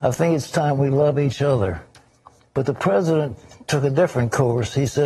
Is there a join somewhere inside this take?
no; 0 cuts

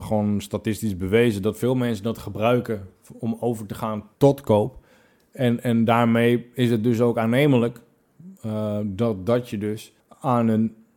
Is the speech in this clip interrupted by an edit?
yes; 3 cuts; at 4.2 s, 8.4 s, 10.0 s

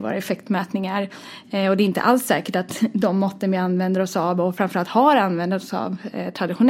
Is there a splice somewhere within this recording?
no; 0 cuts

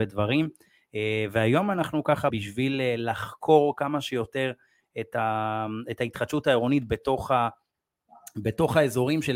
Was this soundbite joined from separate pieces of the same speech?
yes; 1 cut; at 2.3 s

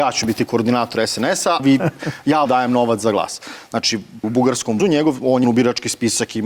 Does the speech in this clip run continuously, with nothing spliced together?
no; 5 cuts; at 1.6 s, 2.5 s, 4.2 s, 4.8 s, 5.4 s

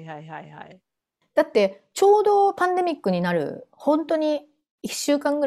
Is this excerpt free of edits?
yes; 0 cuts

